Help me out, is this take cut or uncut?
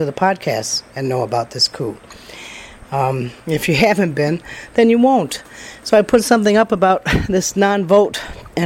cut